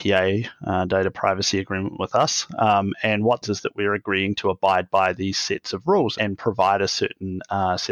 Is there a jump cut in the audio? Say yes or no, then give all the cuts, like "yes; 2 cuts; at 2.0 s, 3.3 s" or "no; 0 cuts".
yes; 2 cuts; at 3.4 s, 6.1 s